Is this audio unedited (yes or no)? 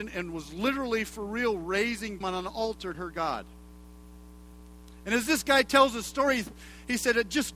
no